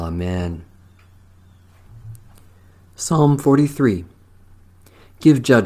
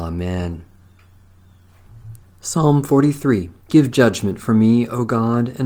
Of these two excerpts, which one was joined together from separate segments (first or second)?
second